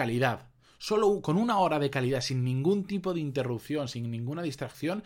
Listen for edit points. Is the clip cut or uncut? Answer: uncut